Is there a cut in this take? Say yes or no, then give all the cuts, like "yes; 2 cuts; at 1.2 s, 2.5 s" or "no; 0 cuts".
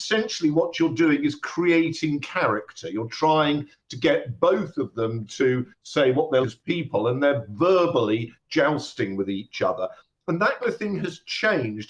yes; 2 cuts; at 6.4 s, 10.6 s